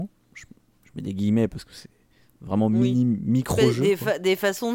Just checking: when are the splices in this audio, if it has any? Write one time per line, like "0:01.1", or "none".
none